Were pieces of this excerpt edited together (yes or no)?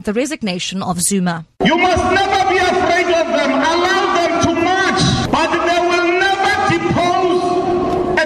yes